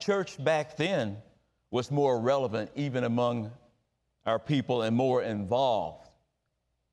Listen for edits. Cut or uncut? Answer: uncut